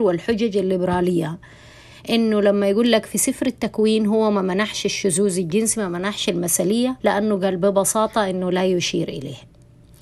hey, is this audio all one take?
no; 1 cut; at 7.0 s

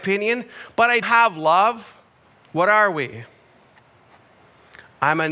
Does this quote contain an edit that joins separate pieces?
yes; 2 cuts; at 1.0 s, 2.2 s

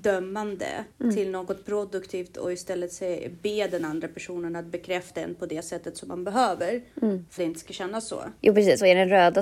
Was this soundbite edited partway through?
yes; 4 cuts; at 0.9 s, 6.9 s, 7.4 s, 8.4 s

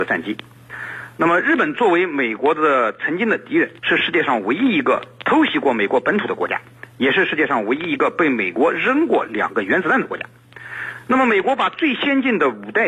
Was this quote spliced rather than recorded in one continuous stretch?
yes; 1 cut; at 3.8 s

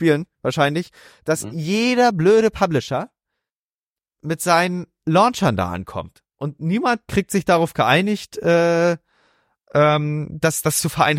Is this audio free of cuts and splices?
yes; 0 cuts

